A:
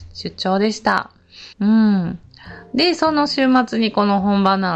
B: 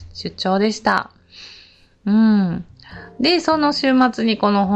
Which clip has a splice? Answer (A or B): A